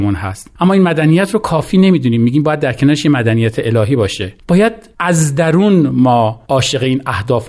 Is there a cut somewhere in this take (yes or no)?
yes